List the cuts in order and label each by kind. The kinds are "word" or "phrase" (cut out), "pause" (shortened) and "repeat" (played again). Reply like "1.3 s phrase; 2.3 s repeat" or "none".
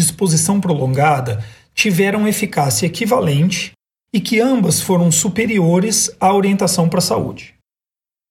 none